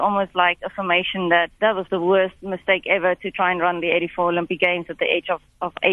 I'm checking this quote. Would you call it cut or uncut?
cut